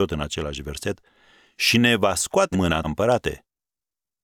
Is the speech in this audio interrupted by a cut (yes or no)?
yes